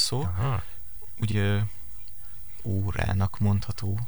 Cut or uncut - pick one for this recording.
cut